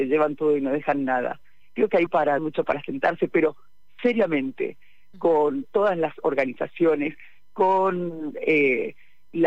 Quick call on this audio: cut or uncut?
cut